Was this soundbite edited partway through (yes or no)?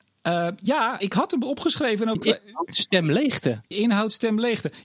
yes